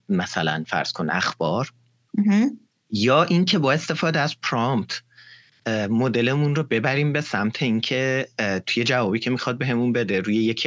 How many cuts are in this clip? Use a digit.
0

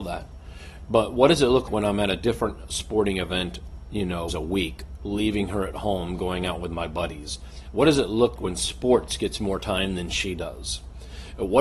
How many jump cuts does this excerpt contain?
3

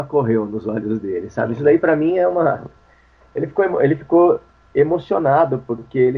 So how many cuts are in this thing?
0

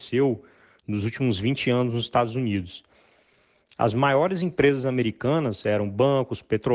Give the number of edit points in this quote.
0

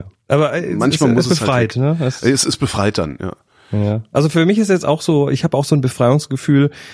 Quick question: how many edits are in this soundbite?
0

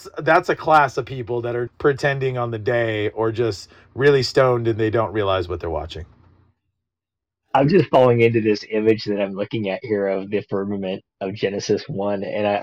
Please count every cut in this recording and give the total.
2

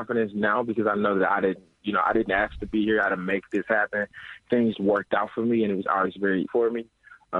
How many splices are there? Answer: 3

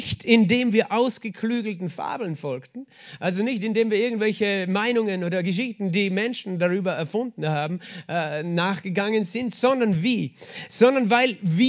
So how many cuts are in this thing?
0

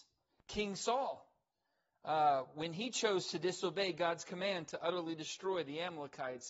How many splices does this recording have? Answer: 0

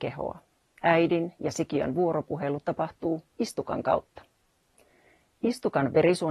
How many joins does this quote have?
0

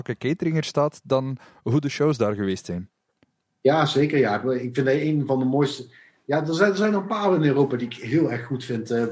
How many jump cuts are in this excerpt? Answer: 0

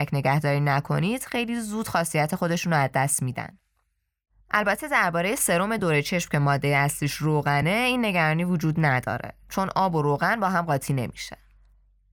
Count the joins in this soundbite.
0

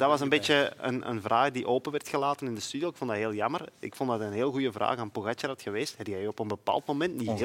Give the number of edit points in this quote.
0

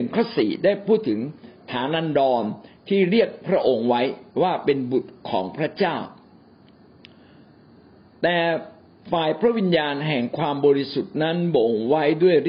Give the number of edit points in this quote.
0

